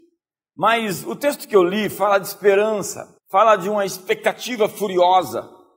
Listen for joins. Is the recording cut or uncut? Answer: cut